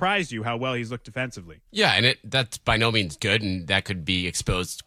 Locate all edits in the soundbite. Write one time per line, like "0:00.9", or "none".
0:01.7